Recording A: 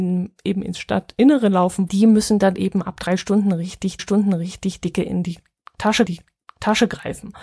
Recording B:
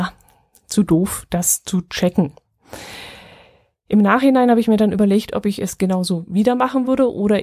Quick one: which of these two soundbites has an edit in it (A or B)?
A